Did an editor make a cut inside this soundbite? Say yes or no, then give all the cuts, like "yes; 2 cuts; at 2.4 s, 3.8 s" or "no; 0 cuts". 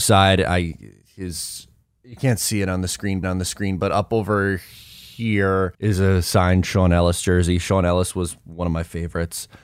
yes; 2 cuts; at 3.2 s, 5.7 s